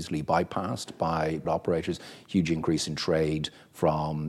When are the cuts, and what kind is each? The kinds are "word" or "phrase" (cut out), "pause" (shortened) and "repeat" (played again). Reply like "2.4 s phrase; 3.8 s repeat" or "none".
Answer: 1.4 s word